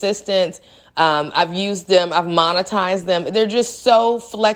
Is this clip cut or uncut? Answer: uncut